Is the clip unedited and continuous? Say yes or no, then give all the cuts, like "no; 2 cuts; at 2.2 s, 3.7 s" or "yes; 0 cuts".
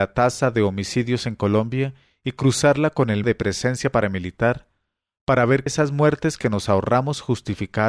no; 2 cuts; at 3.2 s, 5.7 s